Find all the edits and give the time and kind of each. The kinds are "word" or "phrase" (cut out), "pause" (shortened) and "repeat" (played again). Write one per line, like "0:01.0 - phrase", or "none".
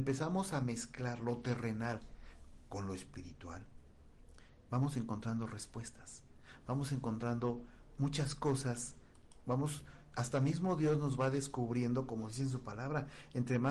none